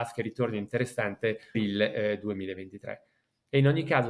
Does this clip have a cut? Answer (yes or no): yes